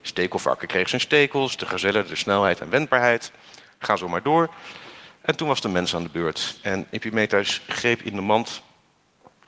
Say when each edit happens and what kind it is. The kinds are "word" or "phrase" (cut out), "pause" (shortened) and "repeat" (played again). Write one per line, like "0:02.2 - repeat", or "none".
none